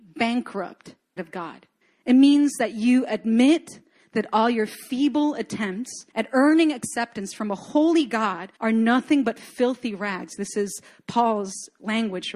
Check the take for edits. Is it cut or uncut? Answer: cut